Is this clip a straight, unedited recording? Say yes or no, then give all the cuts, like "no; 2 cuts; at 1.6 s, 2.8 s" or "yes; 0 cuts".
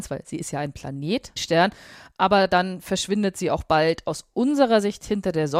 no; 1 cut; at 1.4 s